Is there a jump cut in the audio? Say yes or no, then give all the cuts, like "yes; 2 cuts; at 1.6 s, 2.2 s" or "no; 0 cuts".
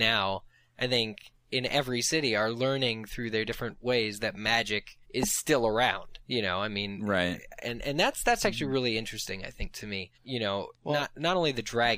yes; 3 cuts; at 5.0 s, 6.2 s, 10.1 s